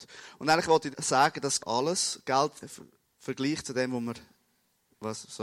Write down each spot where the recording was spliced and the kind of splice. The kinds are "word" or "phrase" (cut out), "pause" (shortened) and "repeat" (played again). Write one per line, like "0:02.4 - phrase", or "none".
0:00.9 - word
0:01.6 - phrase
0:02.6 - phrase